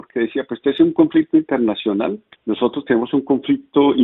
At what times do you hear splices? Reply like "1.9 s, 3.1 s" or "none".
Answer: 2.3 s